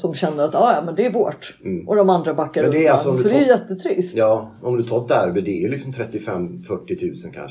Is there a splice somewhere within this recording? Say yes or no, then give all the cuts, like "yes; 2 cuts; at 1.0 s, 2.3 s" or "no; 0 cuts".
no; 0 cuts